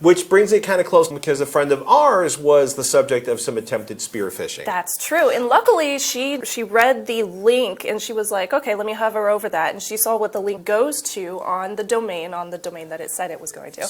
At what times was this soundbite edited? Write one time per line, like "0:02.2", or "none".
0:01.1
0:06.4
0:10.6